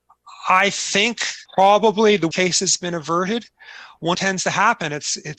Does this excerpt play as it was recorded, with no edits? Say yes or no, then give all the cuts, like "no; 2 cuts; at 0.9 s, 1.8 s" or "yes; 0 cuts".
no; 3 cuts; at 1.5 s, 2.3 s, 4.1 s